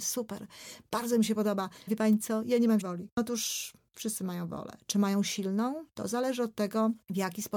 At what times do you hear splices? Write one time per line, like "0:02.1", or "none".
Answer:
0:01.9
0:02.8

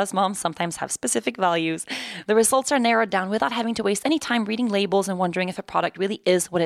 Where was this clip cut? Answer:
none

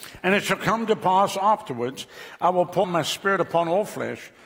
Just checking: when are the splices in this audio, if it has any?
0:02.8

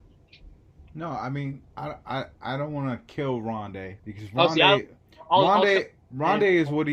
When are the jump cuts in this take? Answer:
0:04.0

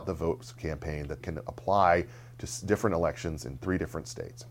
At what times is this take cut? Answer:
0:01.2

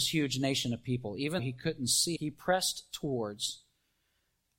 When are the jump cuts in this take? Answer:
0:01.4
0:02.2

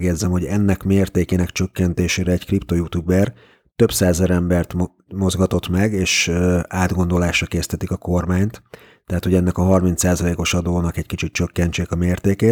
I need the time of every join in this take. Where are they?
none

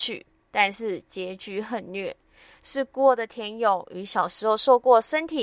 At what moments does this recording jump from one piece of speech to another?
none

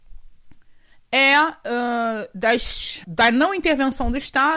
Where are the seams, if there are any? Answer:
0:03.0

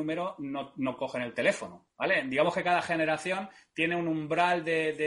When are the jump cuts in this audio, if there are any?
0:01.9

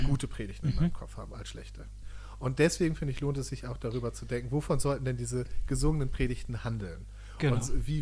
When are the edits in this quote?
none

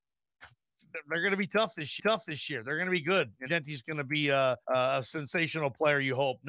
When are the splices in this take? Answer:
0:02.0
0:03.5
0:04.6

